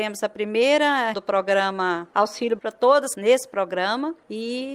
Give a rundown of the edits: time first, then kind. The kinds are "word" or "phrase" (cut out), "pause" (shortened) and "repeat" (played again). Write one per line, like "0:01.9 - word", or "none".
0:01.1 - word
0:02.6 - word
0:03.1 - word

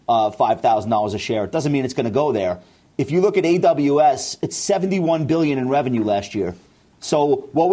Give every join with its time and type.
none

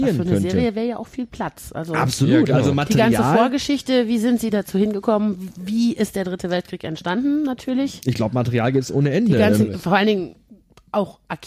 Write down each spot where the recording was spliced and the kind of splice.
none

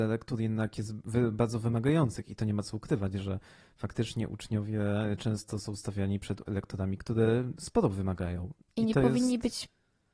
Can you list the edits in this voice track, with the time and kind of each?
none

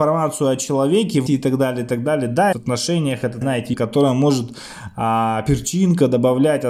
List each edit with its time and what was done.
0:01.3 - word
0:02.5 - phrase
0:03.4 - word
0:03.7 - word

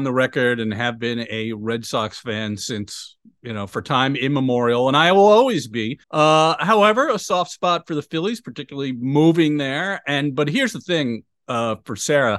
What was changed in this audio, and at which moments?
0:06.0 - pause

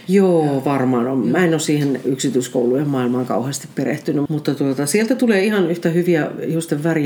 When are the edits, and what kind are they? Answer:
0:04.3 - word

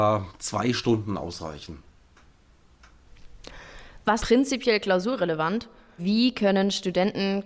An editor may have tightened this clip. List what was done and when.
0:04.2 - word
0:06.0 - word

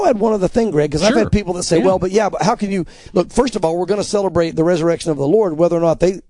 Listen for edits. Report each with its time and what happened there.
none

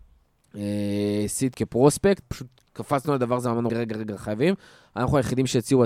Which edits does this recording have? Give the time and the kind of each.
0:01.5 - word
0:02.2 - word
0:03.7 - word

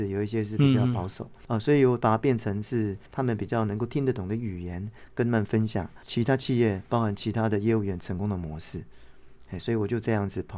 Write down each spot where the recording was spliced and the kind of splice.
0:03.1 - pause

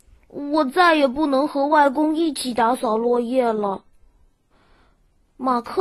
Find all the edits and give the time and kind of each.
none

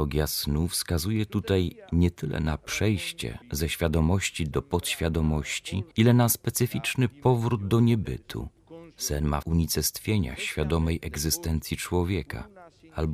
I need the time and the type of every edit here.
0:03.4 - pause
0:05.9 - pause
0:08.9 - pause
0:09.4 - phrase

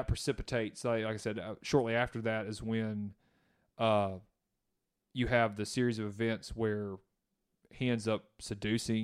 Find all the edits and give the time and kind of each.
none

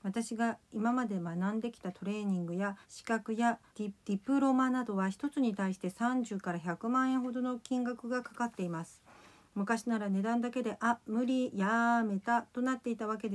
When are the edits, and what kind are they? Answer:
0:02.8 - pause
0:03.7 - pause
0:04.0 - pause

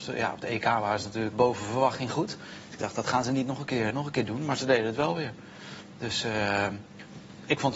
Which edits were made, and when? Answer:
0:01.3 - word
0:03.9 - word

